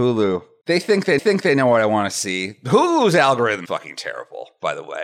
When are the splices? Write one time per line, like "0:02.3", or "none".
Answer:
0:01.2
0:03.7